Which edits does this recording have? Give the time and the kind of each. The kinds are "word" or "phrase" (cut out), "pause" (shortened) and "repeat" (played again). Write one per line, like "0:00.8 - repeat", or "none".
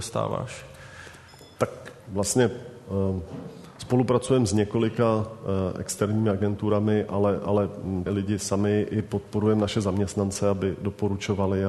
0:02.0 - word
0:08.1 - word